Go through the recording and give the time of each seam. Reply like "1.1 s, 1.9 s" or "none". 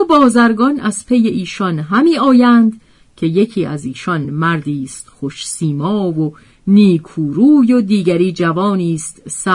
none